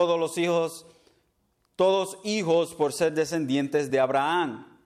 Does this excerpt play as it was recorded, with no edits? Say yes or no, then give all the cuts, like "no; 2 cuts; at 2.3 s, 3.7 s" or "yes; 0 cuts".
yes; 0 cuts